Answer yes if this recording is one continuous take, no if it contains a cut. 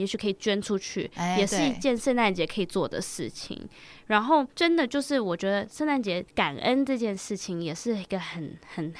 no